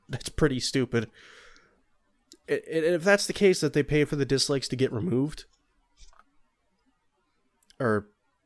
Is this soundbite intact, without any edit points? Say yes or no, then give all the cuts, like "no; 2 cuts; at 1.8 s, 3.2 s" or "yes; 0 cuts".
yes; 0 cuts